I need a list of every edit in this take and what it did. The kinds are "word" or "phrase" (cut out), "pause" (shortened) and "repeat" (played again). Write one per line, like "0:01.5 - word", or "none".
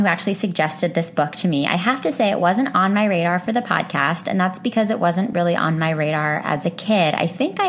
none